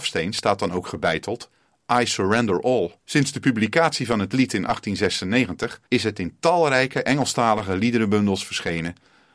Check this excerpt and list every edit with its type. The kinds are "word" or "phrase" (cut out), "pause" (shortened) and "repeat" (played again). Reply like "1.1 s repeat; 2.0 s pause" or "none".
3.0 s pause; 5.9 s pause